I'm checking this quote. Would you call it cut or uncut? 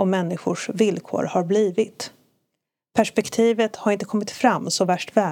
uncut